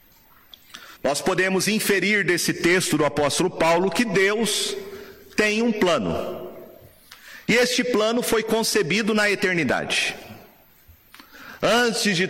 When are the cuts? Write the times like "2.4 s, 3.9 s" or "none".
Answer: 1.0 s